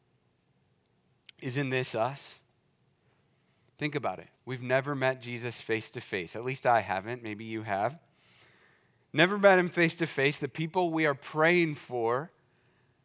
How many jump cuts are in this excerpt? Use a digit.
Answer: 1